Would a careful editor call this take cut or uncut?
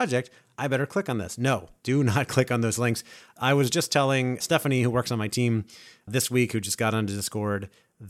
uncut